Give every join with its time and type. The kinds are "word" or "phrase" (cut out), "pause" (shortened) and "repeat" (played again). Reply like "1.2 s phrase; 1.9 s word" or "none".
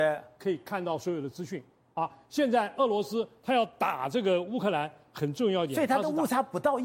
none